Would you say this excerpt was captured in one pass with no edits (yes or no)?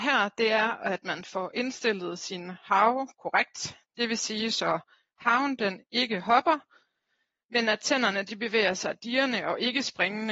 yes